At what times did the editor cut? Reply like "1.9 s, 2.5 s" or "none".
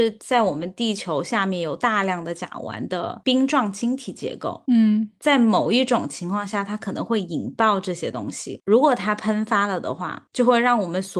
none

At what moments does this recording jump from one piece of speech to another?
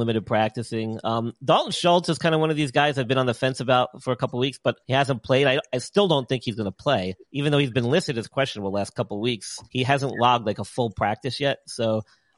4.8 s, 7.2 s, 9.7 s

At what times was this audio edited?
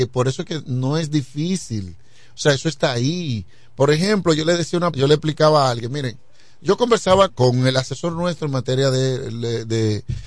4.9 s, 7.3 s

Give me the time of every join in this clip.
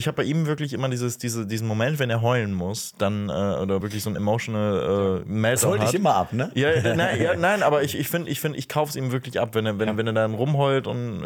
3.8 s

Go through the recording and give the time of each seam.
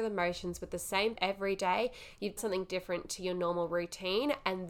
1.1 s, 2.4 s

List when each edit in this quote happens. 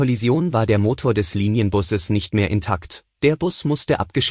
none

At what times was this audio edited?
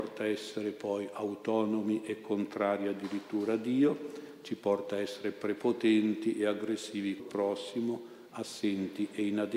7.2 s

